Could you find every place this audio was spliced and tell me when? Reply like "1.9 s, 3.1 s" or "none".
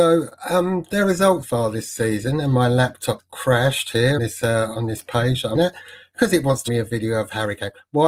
1.4 s, 3.2 s, 4.2 s, 5.5 s, 6.7 s